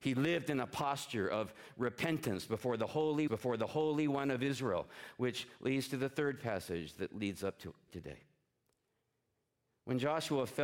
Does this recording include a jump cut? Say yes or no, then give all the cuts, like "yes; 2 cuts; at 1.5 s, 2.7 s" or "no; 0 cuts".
yes; 2 cuts; at 3.3 s, 7.9 s